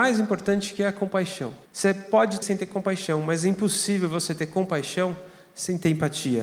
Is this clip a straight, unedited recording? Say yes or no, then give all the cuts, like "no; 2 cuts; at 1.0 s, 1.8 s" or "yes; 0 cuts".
no; 2 cuts; at 1.7 s, 2.4 s